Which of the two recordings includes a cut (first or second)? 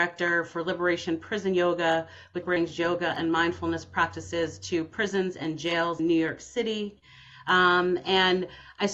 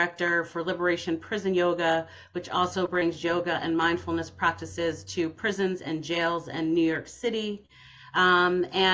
first